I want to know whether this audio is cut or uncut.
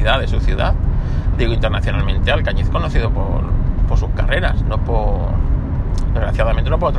uncut